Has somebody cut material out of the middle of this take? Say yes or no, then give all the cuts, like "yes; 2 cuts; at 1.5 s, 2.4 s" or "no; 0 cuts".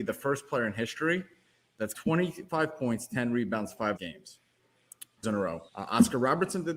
yes; 4 cuts; at 1.9 s, 4.0 s, 5.2 s, 5.7 s